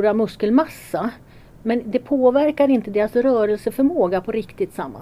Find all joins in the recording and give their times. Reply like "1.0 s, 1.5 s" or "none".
none